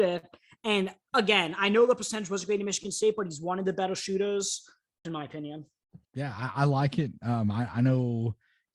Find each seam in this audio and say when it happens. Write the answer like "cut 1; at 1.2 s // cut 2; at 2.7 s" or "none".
cut 1; at 5.0 s // cut 2; at 6.0 s